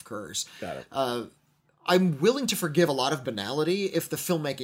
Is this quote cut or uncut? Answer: uncut